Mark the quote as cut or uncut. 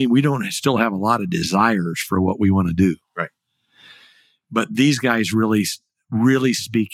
uncut